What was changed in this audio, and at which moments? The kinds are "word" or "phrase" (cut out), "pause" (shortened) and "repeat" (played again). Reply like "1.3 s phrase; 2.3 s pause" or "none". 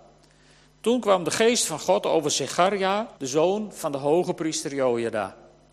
3.2 s pause